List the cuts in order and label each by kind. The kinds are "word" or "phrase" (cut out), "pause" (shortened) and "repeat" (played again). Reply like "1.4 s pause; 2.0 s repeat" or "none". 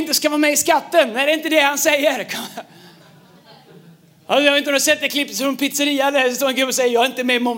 none